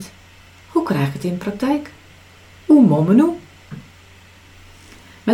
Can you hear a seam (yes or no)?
no